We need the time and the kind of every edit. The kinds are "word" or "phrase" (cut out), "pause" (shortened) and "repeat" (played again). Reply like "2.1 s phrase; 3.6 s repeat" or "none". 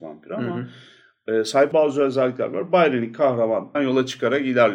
1.7 s word; 3.7 s word